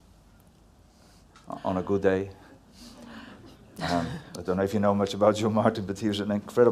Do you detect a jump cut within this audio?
no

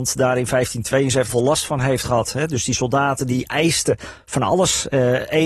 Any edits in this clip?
yes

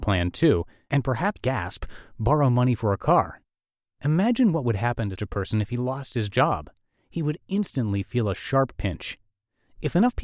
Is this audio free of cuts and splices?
no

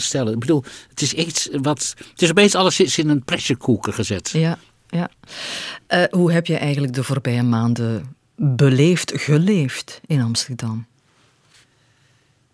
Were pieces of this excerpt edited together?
no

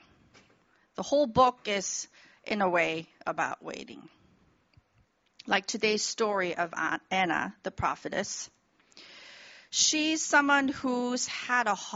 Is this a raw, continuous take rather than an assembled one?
yes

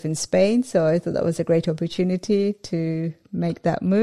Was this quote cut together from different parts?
no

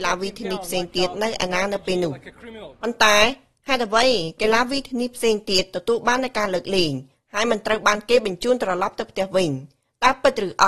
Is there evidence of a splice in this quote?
no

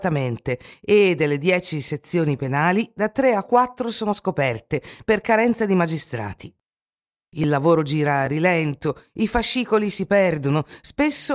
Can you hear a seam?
no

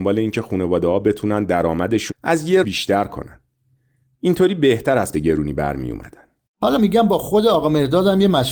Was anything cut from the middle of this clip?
yes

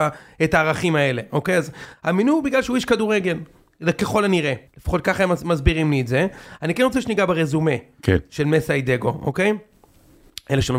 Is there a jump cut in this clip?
yes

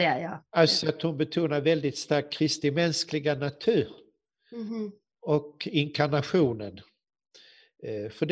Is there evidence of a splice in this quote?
no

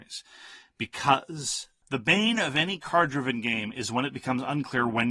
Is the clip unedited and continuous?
yes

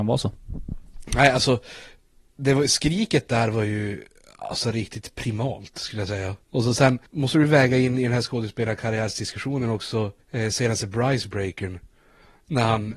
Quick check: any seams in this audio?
yes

